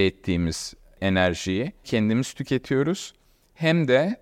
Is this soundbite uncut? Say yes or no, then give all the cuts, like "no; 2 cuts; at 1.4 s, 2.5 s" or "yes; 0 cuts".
no; 1 cut; at 1.8 s